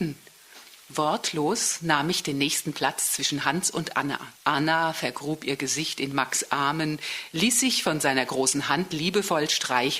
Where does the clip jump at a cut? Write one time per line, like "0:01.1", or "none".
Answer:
0:04.4